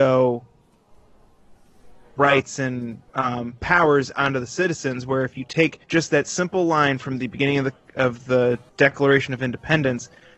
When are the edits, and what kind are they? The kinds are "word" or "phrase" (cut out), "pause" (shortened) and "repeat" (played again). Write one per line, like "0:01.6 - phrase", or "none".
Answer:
0:03.1 - pause
0:05.8 - pause
0:08.7 - pause